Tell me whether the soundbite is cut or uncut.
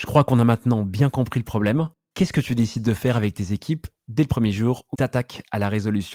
cut